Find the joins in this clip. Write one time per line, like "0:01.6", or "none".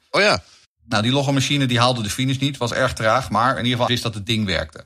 0:03.9